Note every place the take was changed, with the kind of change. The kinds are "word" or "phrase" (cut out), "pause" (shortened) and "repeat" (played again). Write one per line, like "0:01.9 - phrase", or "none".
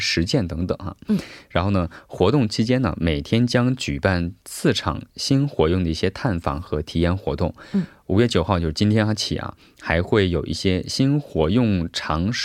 none